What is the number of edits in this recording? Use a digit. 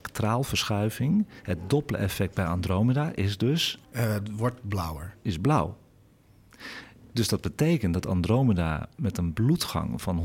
1